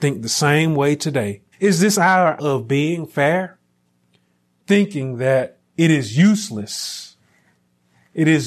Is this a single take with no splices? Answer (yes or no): no